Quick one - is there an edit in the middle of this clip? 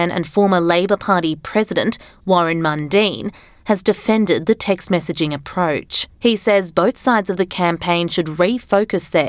yes; 1 cut; at 6.1 s

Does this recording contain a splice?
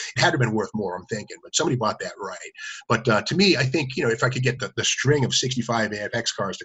no; 0 cuts

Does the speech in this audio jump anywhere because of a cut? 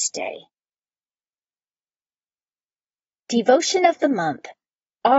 no; 0 cuts

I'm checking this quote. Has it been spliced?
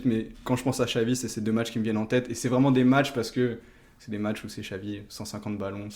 no; 0 cuts

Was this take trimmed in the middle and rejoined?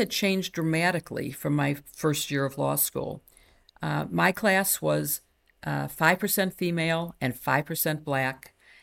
no; 0 cuts

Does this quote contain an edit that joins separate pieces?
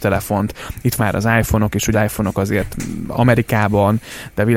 yes; 2 cuts; at 1.0 s, 1.9 s

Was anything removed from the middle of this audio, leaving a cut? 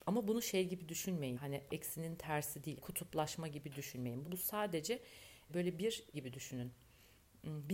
yes; 6 cuts; at 1.3 s, 1.7 s, 2.8 s, 4.2 s, 5.5 s, 6.1 s

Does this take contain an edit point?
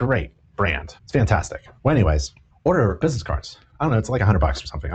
yes; 3 cuts; at 1.0 s, 2.5 s, 3.0 s

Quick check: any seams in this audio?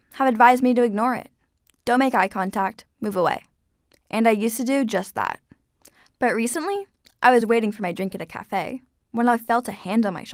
no; 0 cuts

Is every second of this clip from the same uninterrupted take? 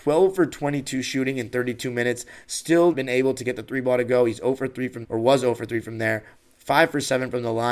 no; 2 cuts; at 2.9 s, 5.0 s

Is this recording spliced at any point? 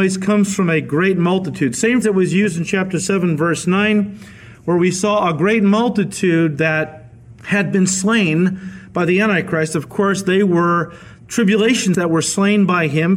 yes; 2 cuts; at 2.0 s, 11.9 s

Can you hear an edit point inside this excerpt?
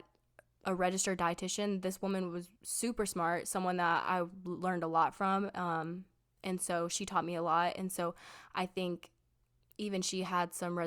yes; 1 cut; at 2.6 s

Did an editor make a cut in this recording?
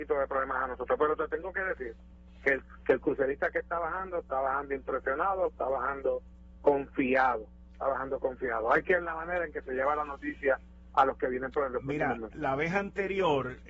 yes; 2 cuts; at 9.0 s, 12.3 s

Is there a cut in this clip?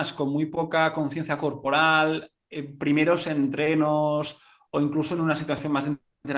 no; 0 cuts

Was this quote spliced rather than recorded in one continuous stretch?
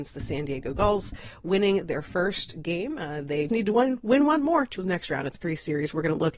yes; 3 cuts; at 3.5 s, 4.8 s, 5.3 s

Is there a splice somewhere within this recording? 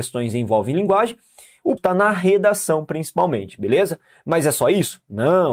yes; 1 cut; at 1.8 s

